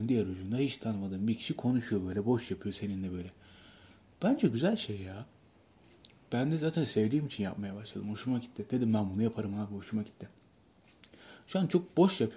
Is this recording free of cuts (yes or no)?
yes